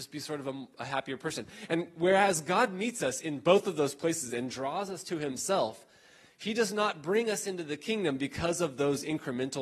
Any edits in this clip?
no; 0 cuts

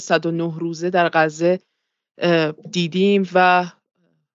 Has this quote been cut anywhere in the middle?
no; 0 cuts

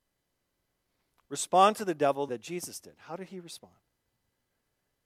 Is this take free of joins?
no; 1 cut; at 2.3 s

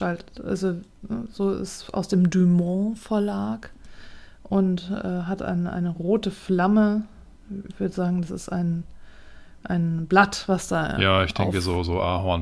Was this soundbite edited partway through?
no; 0 cuts

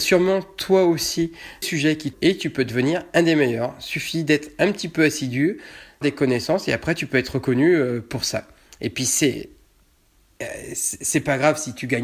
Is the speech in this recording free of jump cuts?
no; 3 cuts; at 1.6 s, 2.1 s, 6.0 s

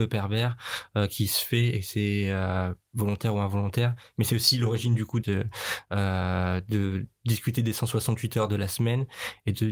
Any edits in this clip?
yes; 1 cut; at 5.2 s

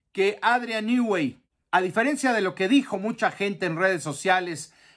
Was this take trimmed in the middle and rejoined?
no; 0 cuts

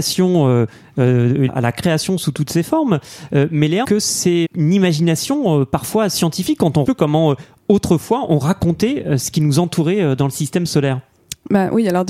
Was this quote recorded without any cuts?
no; 4 cuts; at 1.5 s, 3.8 s, 4.4 s, 6.8 s

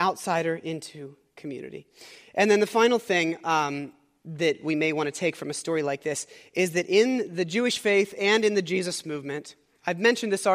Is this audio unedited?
yes; 0 cuts

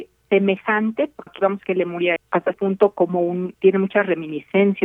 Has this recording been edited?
yes; 5 cuts; at 1.3 s, 1.6 s, 2.2 s, 2.5 s, 3.5 s

